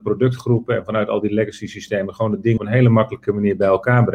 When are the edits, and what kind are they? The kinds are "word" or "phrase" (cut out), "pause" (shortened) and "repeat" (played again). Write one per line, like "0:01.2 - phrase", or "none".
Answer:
0:02.6 - word